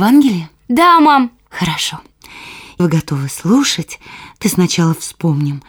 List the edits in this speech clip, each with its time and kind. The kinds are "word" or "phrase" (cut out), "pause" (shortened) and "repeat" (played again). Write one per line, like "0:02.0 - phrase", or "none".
0:02.8 - word
0:04.4 - word